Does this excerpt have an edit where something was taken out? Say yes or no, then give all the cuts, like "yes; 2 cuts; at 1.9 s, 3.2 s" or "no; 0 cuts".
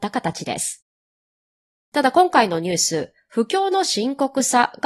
no; 0 cuts